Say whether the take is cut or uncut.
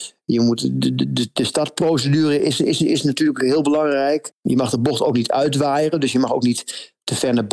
uncut